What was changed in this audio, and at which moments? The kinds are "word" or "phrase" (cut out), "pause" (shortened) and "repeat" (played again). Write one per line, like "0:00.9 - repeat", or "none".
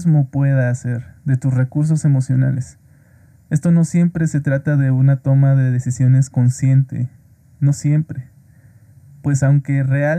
none